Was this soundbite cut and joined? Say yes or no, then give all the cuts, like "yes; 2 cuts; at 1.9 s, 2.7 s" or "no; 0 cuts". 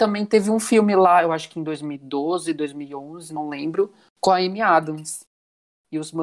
no; 0 cuts